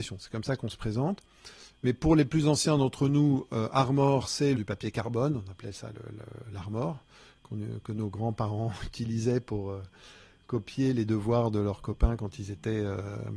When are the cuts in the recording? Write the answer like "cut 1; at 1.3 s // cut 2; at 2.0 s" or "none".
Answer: cut 1; at 4.5 s